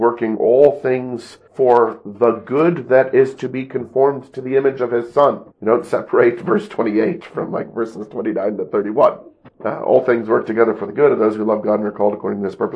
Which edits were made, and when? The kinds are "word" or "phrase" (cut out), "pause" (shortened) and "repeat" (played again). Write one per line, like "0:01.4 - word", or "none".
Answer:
0:01.5 - pause
0:05.5 - pause
0:09.5 - pause